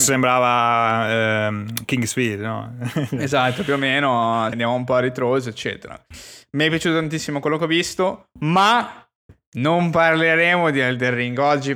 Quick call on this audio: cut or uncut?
cut